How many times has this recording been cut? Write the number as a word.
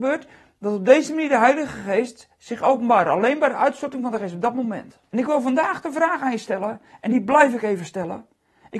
one